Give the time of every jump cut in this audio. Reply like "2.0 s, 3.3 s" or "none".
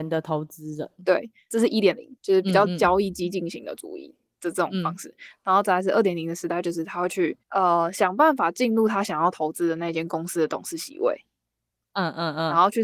2.2 s, 7.4 s